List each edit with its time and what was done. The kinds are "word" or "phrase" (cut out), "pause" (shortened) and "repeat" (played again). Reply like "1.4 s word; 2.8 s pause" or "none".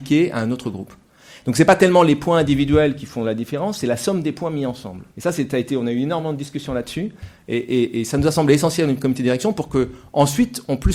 5.1 s pause